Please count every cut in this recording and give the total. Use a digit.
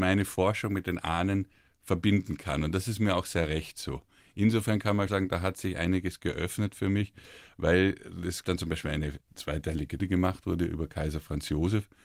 3